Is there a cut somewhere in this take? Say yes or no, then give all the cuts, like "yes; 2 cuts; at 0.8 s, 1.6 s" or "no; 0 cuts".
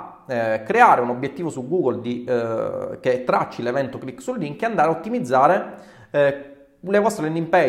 no; 0 cuts